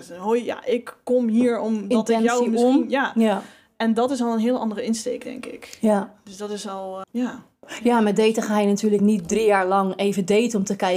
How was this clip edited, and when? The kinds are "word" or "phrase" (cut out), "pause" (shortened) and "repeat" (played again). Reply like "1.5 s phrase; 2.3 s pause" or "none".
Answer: 7.0 s word